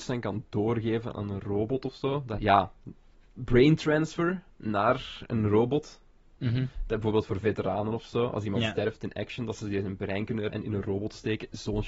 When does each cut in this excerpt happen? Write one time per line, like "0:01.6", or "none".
0:01.1
0:02.4
0:04.5
0:10.5